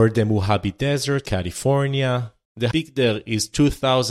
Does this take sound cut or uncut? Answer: cut